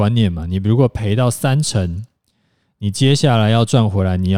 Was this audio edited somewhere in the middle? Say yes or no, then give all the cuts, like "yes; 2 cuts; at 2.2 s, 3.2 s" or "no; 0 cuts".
no; 0 cuts